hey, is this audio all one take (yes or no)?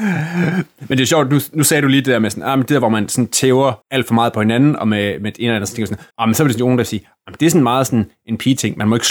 no